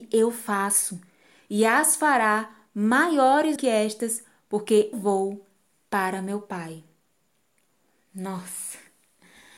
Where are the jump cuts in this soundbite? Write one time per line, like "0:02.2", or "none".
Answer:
0:03.6
0:04.9